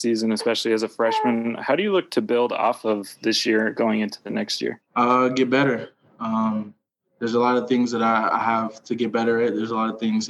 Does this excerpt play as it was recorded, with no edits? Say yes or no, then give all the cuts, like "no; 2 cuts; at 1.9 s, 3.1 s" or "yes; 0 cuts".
no; 1 cut; at 4.9 s